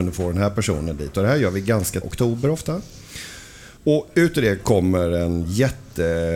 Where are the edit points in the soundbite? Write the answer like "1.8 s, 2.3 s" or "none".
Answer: 2.0 s, 3.8 s